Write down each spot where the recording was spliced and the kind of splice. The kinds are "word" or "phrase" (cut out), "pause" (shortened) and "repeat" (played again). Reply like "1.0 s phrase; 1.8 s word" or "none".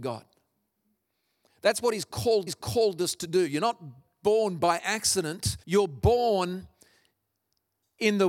2.5 s repeat; 5.6 s pause